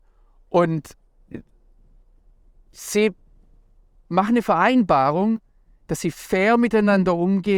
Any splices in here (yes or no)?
no